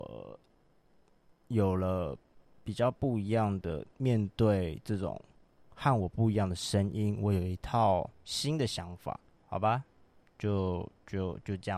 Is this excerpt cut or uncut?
cut